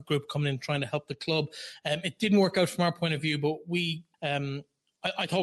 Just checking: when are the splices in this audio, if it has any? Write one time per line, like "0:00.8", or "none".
0:04.1